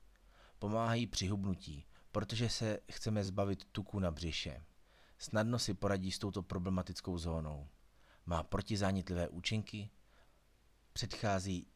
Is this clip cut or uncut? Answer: uncut